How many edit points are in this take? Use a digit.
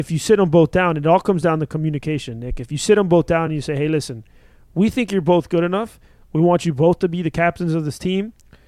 0